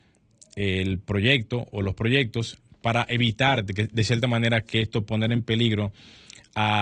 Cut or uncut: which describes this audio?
cut